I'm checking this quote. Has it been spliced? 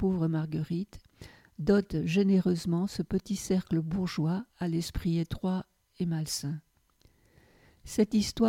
yes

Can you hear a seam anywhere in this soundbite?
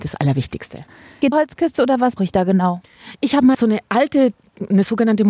yes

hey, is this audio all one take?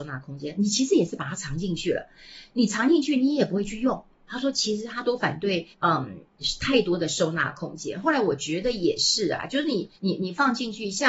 no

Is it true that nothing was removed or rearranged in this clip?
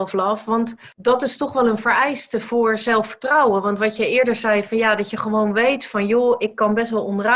no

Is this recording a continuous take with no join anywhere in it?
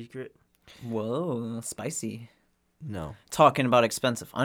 yes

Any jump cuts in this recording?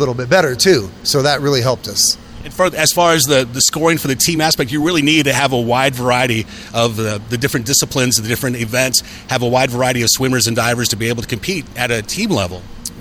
no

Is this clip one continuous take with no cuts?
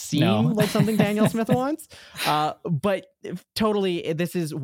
yes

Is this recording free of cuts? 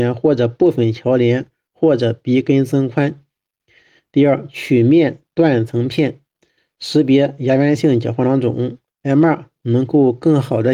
yes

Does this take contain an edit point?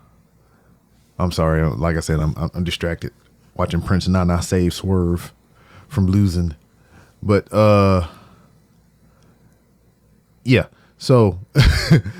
no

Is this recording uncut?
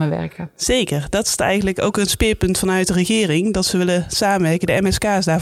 yes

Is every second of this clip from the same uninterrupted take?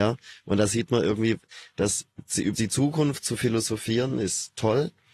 no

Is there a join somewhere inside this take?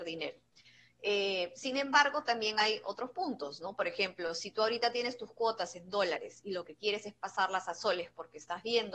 no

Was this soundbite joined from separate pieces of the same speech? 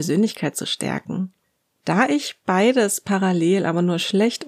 no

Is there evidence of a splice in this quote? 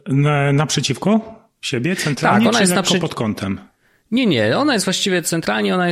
no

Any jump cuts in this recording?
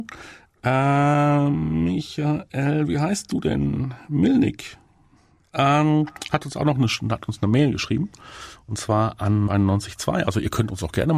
yes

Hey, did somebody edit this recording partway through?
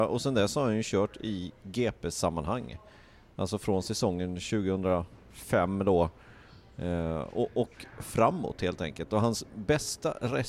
no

